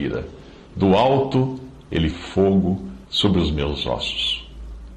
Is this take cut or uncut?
cut